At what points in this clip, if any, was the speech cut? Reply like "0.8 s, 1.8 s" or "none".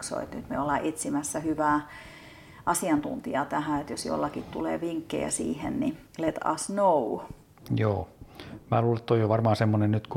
6.1 s